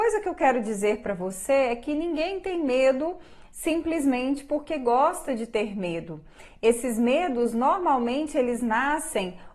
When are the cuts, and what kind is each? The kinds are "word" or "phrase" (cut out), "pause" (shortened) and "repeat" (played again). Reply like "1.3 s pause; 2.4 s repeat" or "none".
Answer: none